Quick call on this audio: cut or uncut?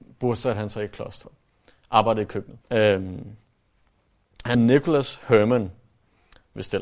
cut